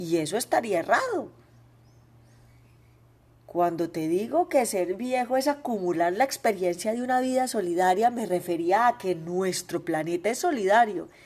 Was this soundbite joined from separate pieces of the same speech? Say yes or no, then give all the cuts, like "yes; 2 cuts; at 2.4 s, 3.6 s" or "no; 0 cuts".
no; 0 cuts